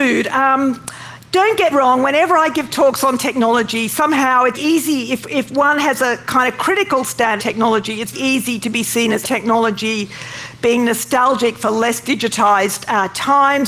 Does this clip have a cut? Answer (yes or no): yes